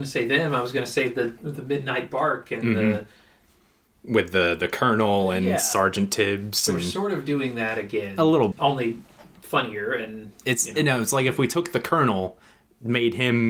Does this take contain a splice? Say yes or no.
yes